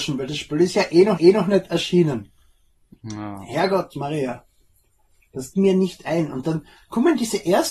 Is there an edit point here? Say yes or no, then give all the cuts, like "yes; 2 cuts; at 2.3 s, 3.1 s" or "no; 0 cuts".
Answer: yes; 2 cuts; at 1.2 s, 5.5 s